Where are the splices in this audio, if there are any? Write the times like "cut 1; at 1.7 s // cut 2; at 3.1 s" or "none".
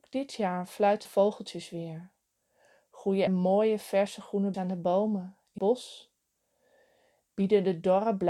cut 1; at 1.0 s // cut 2; at 3.3 s // cut 3; at 4.5 s // cut 4; at 5.6 s